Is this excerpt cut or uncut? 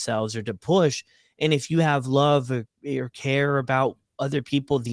uncut